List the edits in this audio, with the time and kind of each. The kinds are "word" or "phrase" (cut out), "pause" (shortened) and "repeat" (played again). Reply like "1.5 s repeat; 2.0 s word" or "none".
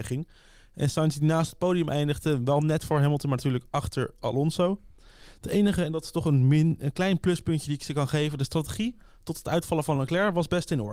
none